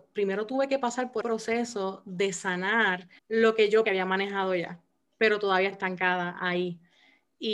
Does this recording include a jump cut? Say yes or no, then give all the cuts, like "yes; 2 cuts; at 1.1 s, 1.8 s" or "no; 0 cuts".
yes; 4 cuts; at 1.2 s, 3.2 s, 3.8 s, 5.7 s